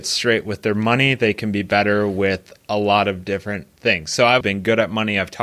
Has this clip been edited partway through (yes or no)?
yes